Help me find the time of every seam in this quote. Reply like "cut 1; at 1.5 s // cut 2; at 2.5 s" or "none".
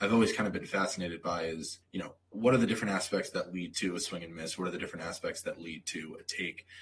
cut 1; at 1.8 s // cut 2; at 2.3 s

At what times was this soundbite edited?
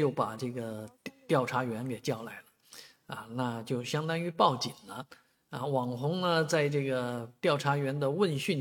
none

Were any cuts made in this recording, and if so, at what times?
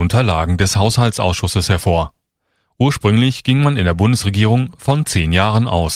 none

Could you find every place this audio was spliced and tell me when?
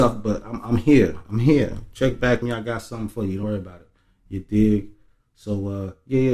cut 1; at 2.4 s // cut 2; at 3.4 s

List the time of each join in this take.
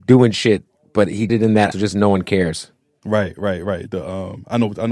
cut 1; at 1.3 s // cut 2; at 1.7 s

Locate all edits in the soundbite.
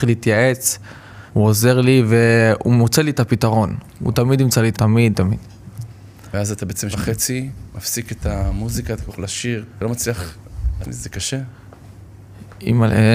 cut 1; at 1.3 s // cut 2; at 4.7 s // cut 3; at 6.9 s // cut 4; at 9.1 s // cut 5; at 9.7 s // cut 6; at 10.8 s

